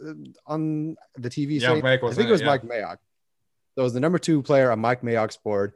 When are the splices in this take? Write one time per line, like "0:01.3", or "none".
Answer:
0:01.8